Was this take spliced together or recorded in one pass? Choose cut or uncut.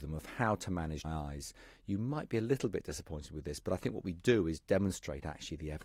cut